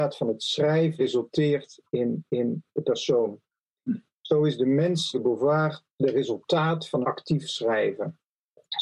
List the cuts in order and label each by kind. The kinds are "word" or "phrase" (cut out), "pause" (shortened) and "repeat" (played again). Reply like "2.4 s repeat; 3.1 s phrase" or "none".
1.0 s word; 2.3 s repeat; 5.1 s word; 5.9 s pause; 7.0 s word